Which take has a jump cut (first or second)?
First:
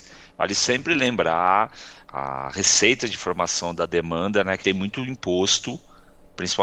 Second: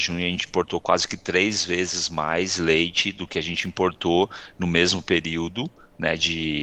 first